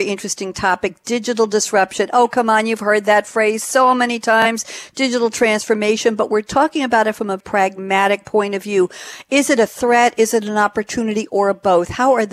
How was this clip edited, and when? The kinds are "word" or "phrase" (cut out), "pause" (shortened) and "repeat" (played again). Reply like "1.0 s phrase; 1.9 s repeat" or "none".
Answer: 7.4 s word

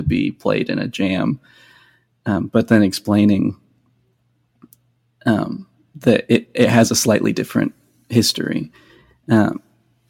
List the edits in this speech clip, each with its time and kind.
none

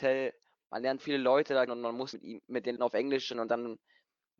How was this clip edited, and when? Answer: 1.0 s word; 1.7 s word; 2.1 s word; 2.8 s word; 3.3 s word

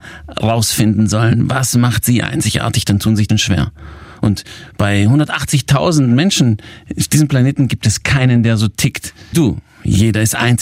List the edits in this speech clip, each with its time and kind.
3.3 s word; 9.3 s word

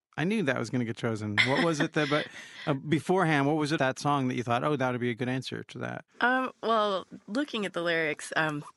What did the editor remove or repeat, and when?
3.8 s word; 6.1 s pause

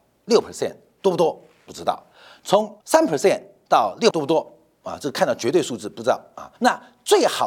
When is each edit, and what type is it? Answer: 2.8 s pause; 4.1 s word; 6.6 s pause

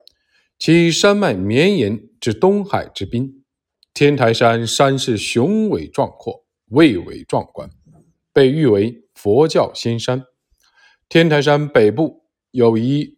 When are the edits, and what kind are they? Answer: none

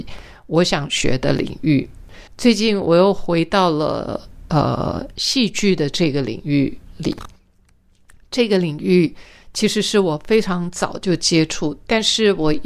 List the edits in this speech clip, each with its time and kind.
2.3 s pause

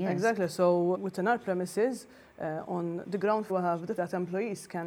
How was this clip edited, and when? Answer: 0.9 s word; 3.5 s word; 4.0 s word

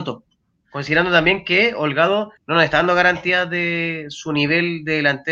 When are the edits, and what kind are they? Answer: 2.4 s pause

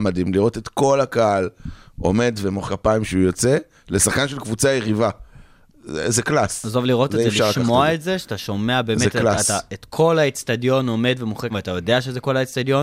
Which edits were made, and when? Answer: 2.7 s word; 11.5 s word

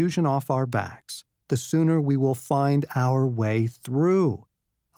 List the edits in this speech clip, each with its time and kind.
none

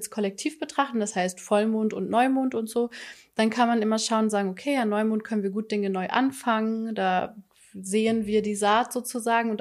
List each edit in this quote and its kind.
none

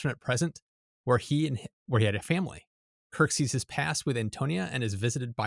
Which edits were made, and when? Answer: none

